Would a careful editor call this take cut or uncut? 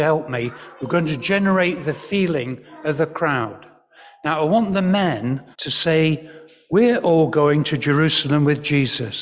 cut